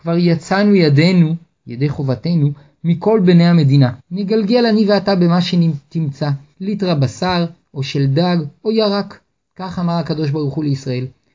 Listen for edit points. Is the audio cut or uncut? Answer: cut